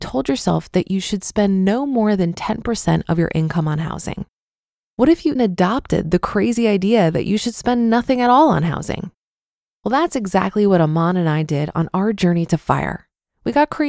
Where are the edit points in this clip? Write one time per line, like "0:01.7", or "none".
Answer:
0:05.4